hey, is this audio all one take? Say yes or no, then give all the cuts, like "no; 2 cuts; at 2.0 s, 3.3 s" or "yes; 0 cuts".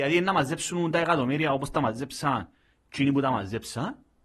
yes; 0 cuts